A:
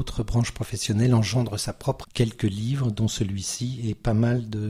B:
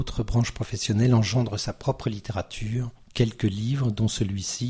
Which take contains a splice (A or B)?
A